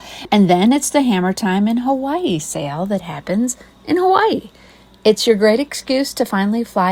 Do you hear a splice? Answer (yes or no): no